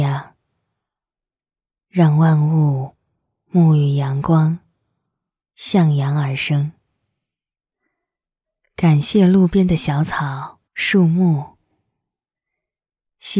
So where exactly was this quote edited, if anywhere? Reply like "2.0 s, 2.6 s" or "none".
10.7 s